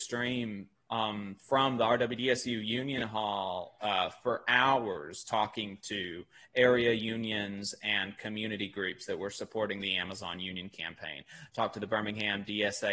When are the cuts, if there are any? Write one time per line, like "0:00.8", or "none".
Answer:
none